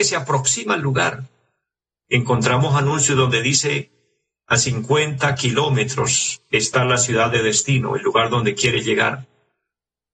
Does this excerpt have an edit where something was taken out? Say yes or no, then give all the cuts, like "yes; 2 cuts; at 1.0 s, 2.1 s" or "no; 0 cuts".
no; 0 cuts